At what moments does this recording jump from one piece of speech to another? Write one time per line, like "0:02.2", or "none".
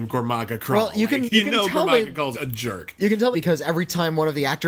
0:01.3
0:02.3
0:03.3

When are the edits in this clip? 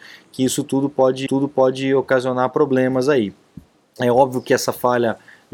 0:01.3

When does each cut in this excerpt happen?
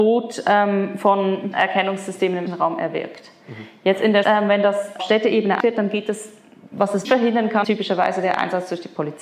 0:01.5
0:02.5
0:04.2
0:05.0
0:05.6
0:06.7
0:07.0
0:07.6

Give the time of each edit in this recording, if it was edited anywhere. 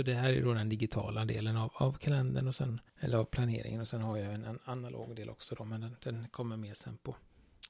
0:02.9

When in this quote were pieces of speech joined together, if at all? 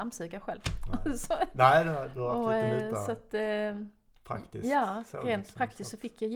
none

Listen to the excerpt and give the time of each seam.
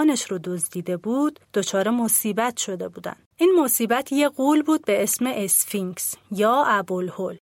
0:01.4
0:03.3

